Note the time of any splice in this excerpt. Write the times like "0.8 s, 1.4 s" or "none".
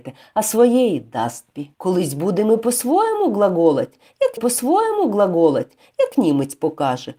1.7 s, 4.4 s

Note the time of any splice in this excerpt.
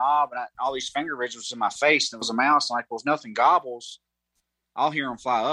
2.2 s

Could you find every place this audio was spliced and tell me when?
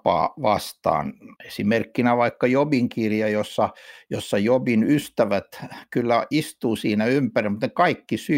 1.4 s

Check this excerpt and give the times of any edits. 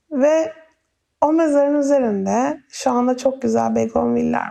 none

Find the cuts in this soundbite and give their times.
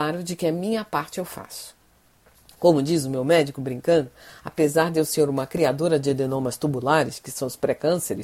none

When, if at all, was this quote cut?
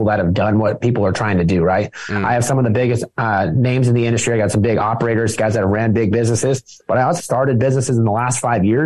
7.2 s

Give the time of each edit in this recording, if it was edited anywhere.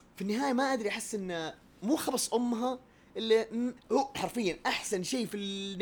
1.8 s, 3.8 s, 4.1 s

